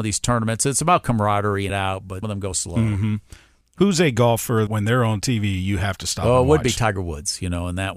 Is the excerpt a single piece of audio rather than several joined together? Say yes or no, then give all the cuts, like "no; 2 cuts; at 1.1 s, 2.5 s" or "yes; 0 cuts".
no; 4 cuts; at 1.7 s, 2.2 s, 2.5 s, 4.7 s